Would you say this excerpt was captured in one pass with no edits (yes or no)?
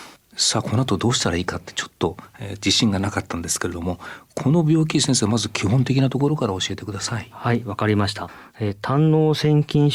yes